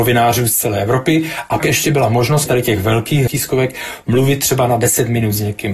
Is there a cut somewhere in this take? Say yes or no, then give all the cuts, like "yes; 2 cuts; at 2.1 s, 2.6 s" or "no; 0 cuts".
yes; 3 cuts; at 1.6 s, 2.5 s, 3.3 s